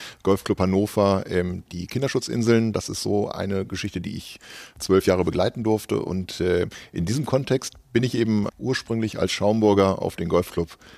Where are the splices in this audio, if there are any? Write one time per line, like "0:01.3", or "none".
0:08.5